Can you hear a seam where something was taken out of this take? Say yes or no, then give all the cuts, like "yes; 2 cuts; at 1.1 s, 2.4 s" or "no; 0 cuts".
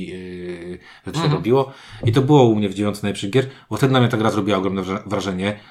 yes; 1 cut; at 1.1 s